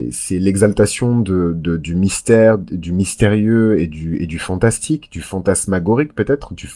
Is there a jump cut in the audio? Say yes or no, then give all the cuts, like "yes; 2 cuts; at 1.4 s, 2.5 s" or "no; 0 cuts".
no; 0 cuts